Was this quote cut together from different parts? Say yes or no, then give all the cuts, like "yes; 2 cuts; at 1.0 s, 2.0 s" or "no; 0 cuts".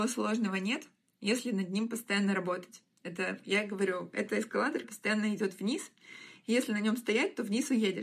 yes; 1 cut; at 4.8 s